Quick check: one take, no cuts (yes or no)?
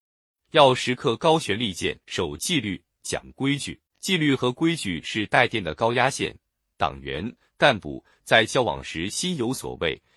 no